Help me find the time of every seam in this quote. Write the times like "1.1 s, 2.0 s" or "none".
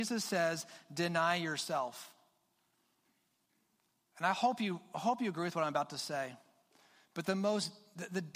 none